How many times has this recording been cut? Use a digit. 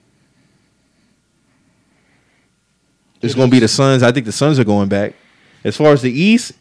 0